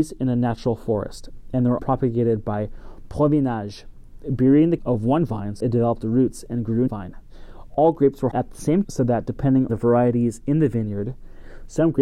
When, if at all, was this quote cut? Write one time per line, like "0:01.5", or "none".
0:01.8
0:04.8
0:05.6
0:06.9
0:08.3
0:08.8
0:09.7